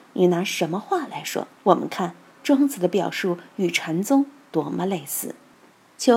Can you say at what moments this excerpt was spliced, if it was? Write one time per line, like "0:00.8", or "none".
0:01.6